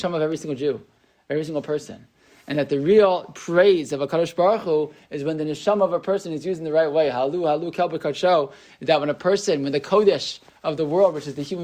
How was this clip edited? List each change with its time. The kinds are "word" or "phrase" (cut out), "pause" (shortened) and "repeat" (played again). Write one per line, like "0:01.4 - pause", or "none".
none